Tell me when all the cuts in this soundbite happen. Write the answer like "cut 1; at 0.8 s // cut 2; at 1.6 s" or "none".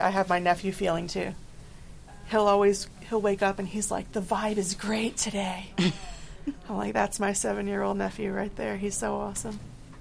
none